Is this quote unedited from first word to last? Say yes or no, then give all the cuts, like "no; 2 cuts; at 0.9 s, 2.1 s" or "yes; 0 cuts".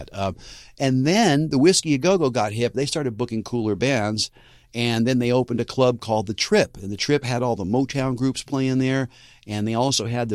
yes; 0 cuts